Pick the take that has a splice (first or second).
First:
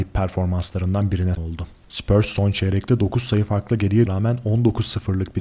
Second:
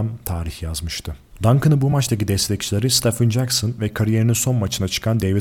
first